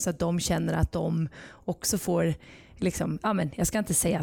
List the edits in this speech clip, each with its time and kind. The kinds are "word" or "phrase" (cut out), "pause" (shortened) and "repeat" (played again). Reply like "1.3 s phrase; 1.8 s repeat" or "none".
none